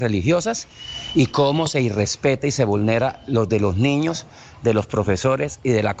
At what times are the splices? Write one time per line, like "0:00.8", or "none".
0:03.5